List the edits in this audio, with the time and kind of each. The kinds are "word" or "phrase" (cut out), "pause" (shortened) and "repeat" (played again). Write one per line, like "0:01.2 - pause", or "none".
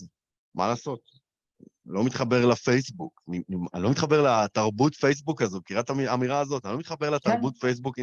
none